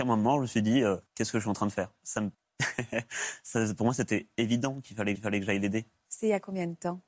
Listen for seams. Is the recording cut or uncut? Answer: cut